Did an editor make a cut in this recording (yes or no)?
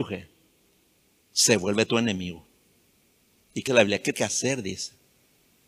yes